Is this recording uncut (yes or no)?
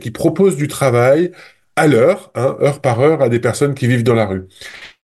yes